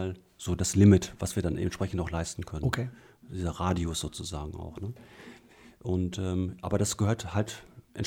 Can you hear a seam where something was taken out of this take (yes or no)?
no